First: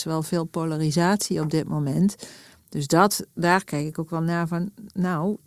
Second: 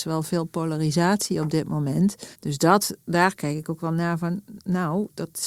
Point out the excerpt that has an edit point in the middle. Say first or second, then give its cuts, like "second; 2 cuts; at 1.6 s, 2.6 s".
second; 1 cut; at 2.3 s